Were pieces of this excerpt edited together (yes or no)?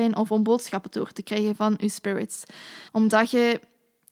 yes